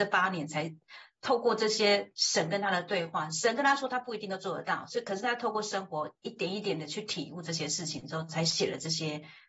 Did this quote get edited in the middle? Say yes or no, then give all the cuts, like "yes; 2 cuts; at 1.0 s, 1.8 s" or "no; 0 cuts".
yes; 1 cut; at 6.2 s